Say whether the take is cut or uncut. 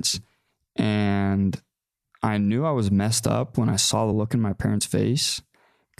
uncut